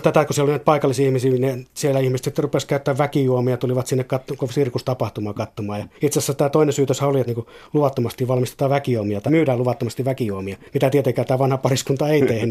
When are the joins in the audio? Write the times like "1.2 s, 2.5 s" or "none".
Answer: 5.9 s, 7.3 s, 9.3 s, 10.7 s